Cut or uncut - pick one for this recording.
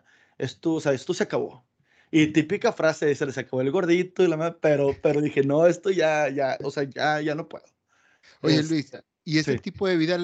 uncut